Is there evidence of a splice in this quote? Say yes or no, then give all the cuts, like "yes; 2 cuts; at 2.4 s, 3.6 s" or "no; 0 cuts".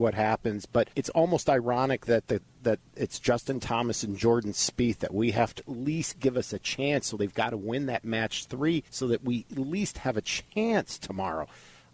yes; 3 cuts; at 0.9 s, 5.6 s, 8.9 s